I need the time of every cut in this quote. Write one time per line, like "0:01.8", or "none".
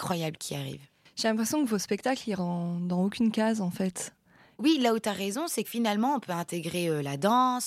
0:02.4
0:05.6